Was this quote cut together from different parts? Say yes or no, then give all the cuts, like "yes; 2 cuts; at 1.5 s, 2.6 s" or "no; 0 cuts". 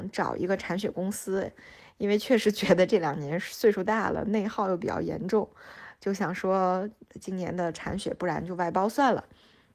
yes; 1 cut; at 7.1 s